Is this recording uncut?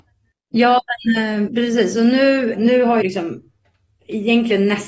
no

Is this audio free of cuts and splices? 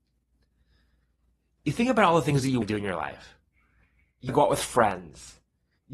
no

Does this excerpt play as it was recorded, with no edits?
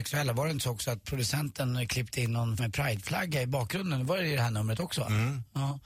no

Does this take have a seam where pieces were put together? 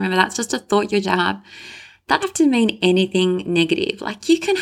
yes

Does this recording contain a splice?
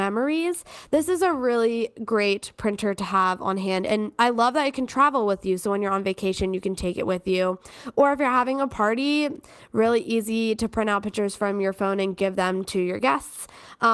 no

